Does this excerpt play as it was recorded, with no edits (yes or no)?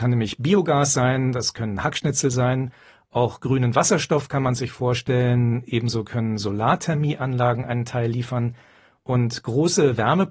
yes